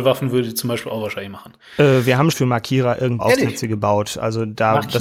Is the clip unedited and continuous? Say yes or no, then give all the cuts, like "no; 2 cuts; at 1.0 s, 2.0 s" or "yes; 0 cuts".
no; 2 cuts; at 2.3 s, 3.2 s